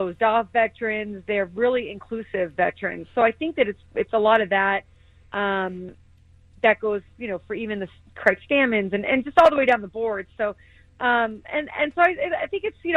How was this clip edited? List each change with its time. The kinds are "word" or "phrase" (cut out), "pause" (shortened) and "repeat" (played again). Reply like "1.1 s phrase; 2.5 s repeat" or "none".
none